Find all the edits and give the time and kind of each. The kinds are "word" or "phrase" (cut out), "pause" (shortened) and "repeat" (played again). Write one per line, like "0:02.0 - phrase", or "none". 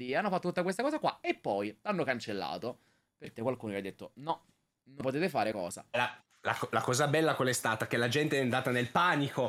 0:03.3 - word
0:05.0 - word
0:05.5 - word

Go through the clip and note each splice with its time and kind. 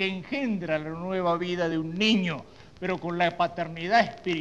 none

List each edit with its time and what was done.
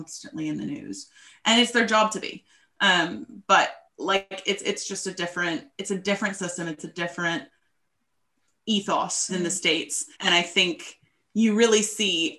0:03.9 - pause
0:09.3 - phrase
0:10.1 - pause

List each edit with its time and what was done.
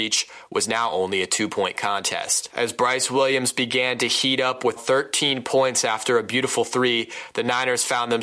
0:04.8 - word

